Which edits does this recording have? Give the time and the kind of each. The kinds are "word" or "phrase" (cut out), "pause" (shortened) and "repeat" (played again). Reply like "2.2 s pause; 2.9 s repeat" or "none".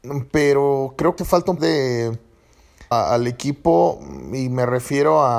1.2 s phrase; 1.6 s phrase; 2.9 s phrase